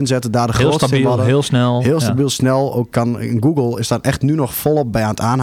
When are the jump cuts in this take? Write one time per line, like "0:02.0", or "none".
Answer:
0:02.9